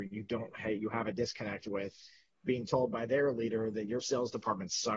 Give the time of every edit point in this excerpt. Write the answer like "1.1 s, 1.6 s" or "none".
none